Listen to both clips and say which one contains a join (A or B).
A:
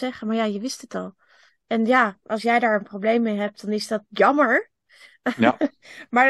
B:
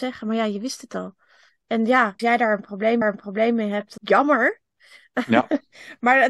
B